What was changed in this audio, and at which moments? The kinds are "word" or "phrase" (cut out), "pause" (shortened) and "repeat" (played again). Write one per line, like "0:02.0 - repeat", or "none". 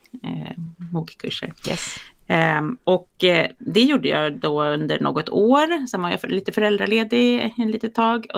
0:01.6 - pause